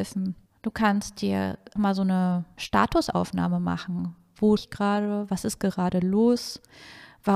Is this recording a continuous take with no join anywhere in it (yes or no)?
no